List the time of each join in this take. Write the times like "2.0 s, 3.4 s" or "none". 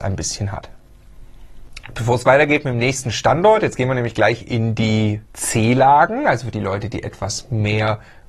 5.3 s